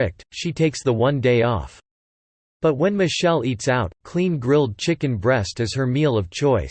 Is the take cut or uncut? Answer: uncut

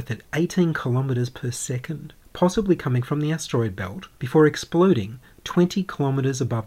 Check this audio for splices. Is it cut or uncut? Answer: cut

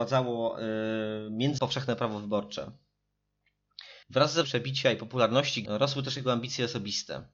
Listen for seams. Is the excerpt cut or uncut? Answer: cut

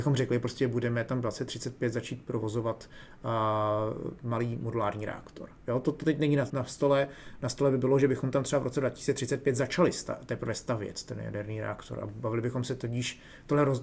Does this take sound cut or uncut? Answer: cut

